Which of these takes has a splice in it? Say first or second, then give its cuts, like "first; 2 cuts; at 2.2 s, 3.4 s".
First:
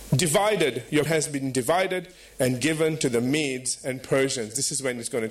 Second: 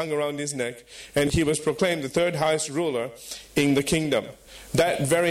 first; 1 cut; at 1.1 s